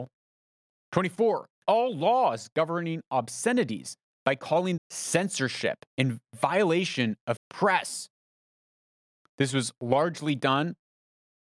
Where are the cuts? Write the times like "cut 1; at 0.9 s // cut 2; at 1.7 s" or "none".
cut 1; at 1.6 s // cut 2; at 4.8 s // cut 3; at 5.9 s // cut 4; at 7.4 s